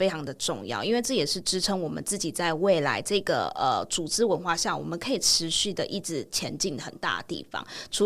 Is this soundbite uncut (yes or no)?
yes